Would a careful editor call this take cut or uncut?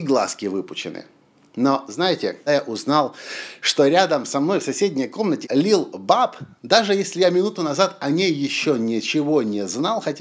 cut